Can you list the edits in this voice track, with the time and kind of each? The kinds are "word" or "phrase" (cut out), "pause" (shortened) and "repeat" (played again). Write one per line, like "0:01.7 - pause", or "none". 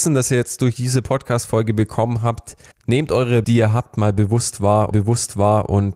0:02.7 - pause
0:03.4 - word
0:04.9 - repeat